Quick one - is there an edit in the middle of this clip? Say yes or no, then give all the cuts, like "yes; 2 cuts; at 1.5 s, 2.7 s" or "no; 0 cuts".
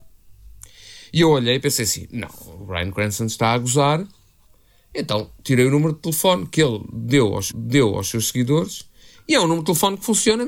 yes; 1 cut; at 7.5 s